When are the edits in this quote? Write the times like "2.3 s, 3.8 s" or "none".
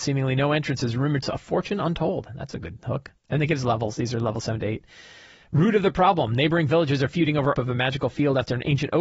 1.2 s, 3.2 s, 7.5 s